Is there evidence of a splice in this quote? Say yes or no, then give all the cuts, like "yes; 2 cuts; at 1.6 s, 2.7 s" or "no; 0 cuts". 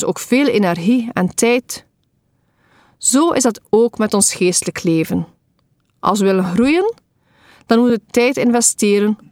no; 0 cuts